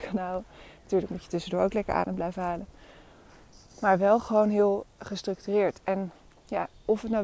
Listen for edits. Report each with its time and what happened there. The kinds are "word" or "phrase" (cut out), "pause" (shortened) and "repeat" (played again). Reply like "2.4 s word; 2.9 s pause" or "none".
none